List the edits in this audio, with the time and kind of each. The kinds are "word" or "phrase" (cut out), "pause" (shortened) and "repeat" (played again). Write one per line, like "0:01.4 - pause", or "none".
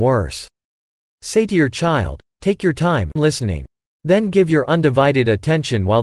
0:03.2 - word